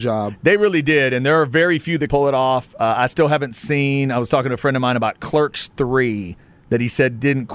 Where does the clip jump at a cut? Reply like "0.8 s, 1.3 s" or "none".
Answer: 2.1 s